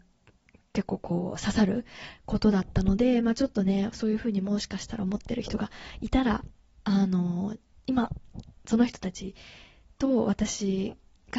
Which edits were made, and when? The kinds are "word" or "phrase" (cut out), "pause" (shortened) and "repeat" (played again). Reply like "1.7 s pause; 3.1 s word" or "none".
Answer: none